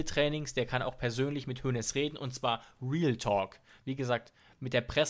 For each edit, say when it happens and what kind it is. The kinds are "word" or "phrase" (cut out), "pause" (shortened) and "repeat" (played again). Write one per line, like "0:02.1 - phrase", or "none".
none